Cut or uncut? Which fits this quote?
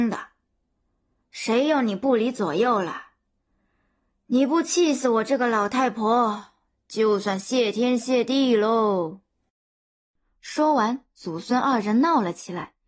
uncut